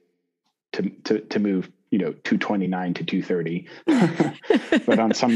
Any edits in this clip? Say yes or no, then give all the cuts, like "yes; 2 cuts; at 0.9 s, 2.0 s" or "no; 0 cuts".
no; 0 cuts